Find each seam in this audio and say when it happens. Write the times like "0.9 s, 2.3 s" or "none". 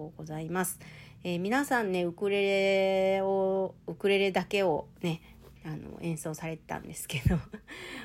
5.6 s